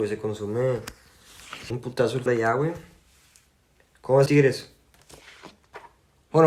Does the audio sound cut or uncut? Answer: cut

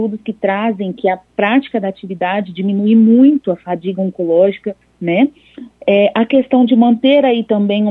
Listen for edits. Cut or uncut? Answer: cut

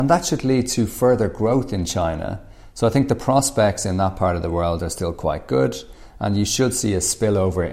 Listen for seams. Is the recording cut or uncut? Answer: uncut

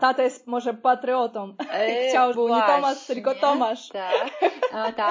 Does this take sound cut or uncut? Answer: cut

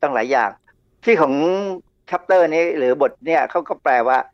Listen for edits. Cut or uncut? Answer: uncut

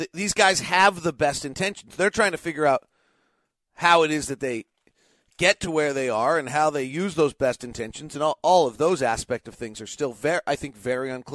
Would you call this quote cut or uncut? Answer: uncut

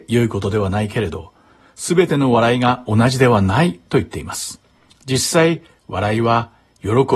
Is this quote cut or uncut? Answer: uncut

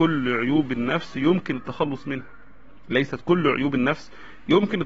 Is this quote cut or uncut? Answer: uncut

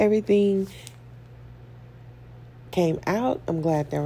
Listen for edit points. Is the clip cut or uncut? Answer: uncut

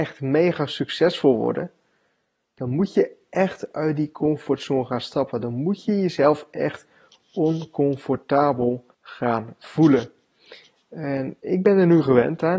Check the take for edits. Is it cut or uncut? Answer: cut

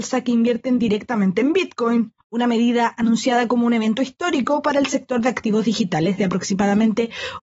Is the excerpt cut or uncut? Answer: cut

